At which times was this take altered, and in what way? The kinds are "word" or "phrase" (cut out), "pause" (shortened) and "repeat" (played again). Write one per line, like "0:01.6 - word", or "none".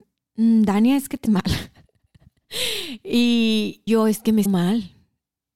0:01.2 - word
0:03.9 - word
0:04.5 - word

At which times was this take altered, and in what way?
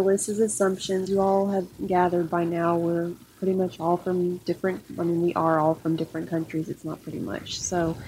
0:01.1 - word

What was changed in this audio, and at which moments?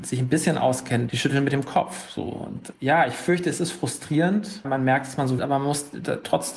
0:02.7 - word
0:04.6 - word
0:05.4 - phrase

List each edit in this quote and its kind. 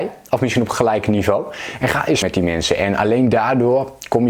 0:02.2 - word

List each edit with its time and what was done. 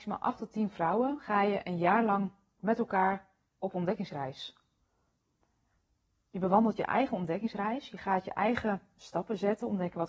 none

